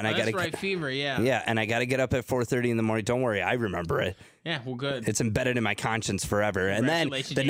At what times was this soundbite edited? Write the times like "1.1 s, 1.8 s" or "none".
none